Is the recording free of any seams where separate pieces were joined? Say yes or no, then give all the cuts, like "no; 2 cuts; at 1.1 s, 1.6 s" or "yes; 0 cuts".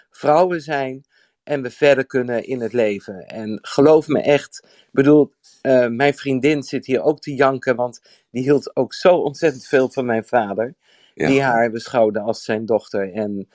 yes; 0 cuts